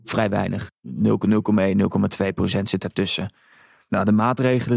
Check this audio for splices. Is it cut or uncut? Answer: uncut